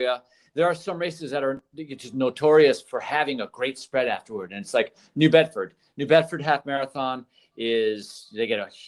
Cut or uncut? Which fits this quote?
uncut